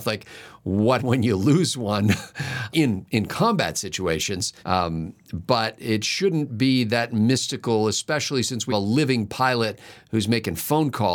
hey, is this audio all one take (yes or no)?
no